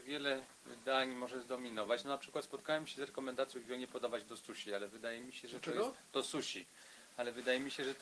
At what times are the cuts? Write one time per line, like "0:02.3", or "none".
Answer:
0:03.5